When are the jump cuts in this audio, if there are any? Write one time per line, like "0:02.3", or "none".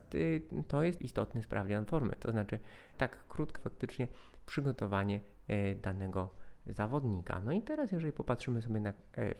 0:01.0
0:02.9
0:03.6